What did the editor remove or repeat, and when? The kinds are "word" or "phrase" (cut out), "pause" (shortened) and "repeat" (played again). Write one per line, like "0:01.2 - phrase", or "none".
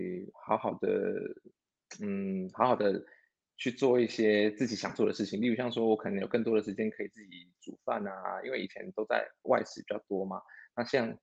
none